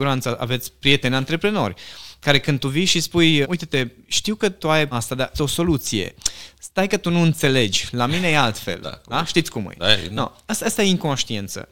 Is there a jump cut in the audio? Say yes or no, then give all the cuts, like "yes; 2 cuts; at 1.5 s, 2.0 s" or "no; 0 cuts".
yes; 3 cuts; at 3.4 s, 4.9 s, 5.3 s